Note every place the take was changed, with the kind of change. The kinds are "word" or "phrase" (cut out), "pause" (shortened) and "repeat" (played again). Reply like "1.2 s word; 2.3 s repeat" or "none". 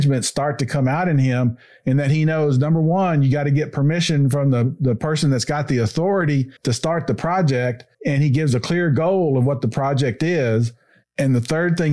6.6 s pause; 7.9 s pause

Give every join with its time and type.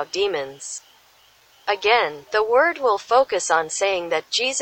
2.3 s pause

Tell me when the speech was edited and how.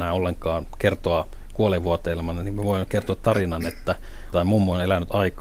4.3 s word

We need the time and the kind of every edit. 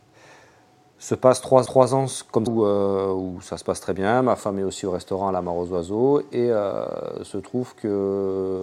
1.7 s repeat; 2.5 s word

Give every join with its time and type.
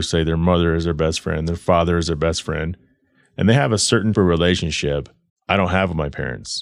4.1 s word; 5.3 s word

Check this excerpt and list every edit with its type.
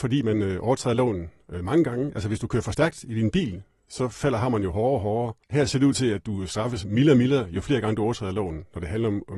5.4 s pause

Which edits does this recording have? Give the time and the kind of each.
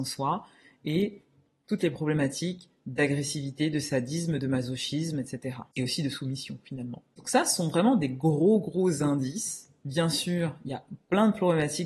none

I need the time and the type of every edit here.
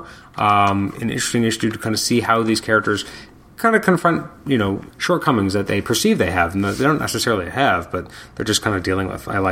4.5 s word; 4.9 s word

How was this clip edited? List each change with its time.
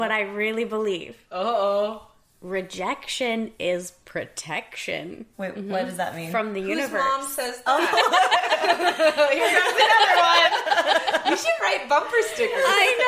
5.3 s pause

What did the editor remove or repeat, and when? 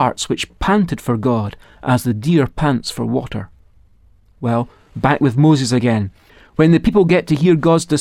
none

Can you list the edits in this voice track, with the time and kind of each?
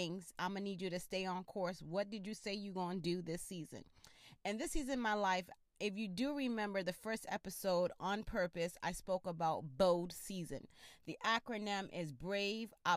none

